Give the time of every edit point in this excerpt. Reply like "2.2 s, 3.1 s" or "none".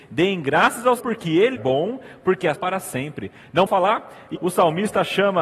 1.0 s, 1.6 s, 2.6 s, 3.7 s, 4.4 s